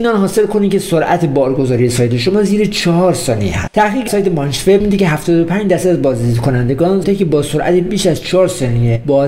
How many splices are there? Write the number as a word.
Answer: four